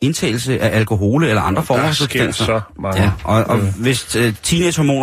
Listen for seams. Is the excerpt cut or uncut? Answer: uncut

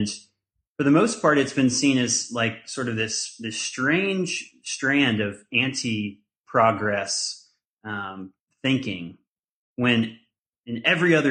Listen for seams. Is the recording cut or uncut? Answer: uncut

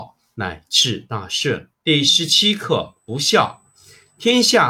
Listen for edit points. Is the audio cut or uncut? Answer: cut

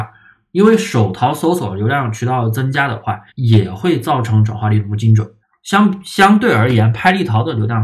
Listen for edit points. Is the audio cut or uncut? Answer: cut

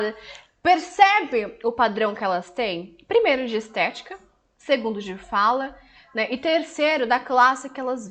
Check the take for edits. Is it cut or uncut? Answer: uncut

